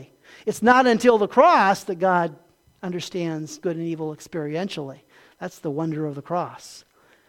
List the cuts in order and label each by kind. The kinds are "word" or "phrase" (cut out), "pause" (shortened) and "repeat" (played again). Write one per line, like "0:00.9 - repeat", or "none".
none